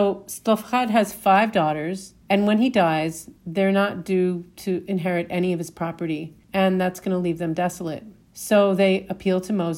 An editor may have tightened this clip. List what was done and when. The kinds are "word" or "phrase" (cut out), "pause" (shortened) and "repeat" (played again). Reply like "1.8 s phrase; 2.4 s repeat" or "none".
2.2 s pause; 3.4 s pause; 6.4 s pause; 8.3 s pause

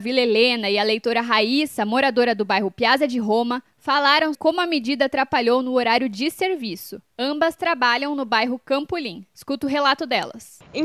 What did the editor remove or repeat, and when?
4.3 s word; 9.3 s pause

